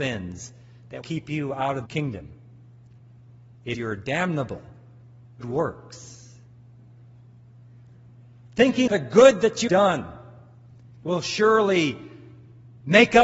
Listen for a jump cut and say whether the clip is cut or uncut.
cut